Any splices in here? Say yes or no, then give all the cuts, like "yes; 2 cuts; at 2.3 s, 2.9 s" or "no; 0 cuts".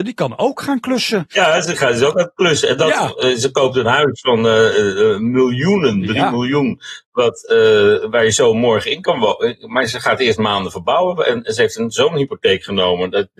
no; 0 cuts